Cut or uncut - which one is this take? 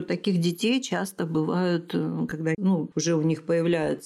uncut